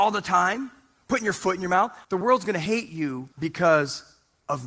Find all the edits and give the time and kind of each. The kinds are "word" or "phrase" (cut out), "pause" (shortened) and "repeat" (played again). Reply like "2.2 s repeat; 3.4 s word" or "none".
2.0 s pause; 3.3 s pause

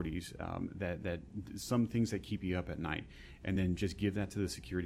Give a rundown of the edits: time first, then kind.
none

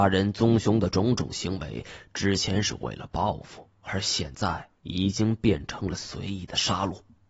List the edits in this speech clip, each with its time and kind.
4.8 s pause

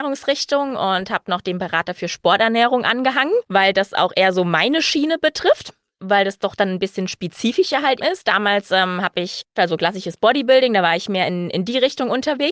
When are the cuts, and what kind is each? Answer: 8.0 s word; 9.6 s phrase

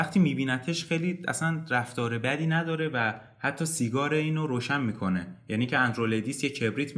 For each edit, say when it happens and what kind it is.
none

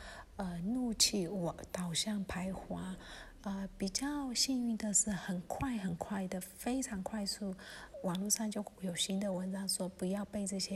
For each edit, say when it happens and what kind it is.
7.9 s word

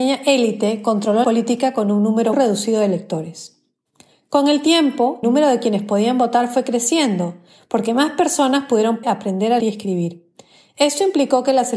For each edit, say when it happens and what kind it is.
1.2 s word; 2.3 s word; 5.2 s word; 9.0 s word; 9.6 s word

